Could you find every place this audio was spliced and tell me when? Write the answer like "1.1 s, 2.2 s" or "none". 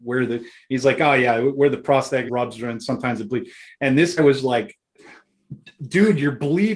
2.3 s, 4.2 s

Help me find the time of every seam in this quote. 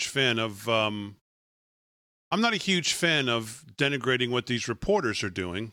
none

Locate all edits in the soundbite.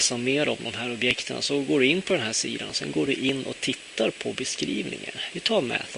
none

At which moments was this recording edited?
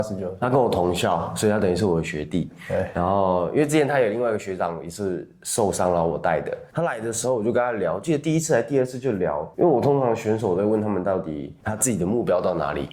9.5 s

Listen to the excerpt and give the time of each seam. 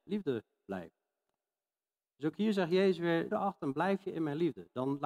3.3 s

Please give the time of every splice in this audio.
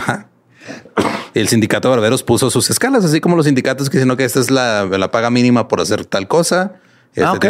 none

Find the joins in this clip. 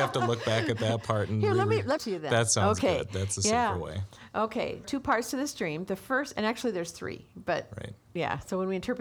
2.0 s, 4.8 s

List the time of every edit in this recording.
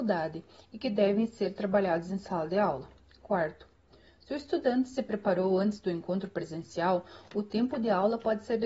none

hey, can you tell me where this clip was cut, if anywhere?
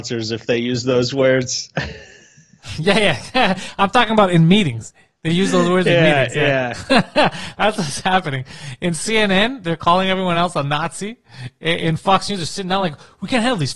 none

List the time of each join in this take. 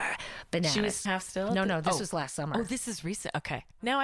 1.1 s

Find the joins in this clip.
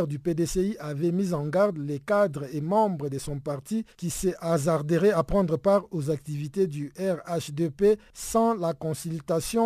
3.9 s

